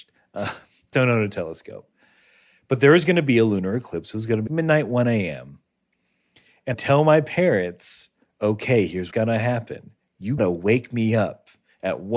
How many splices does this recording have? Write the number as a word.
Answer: five